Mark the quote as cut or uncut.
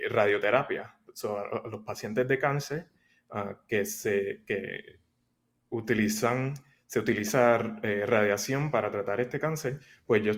uncut